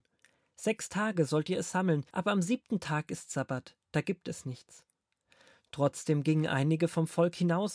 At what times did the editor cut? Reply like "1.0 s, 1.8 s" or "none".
2.1 s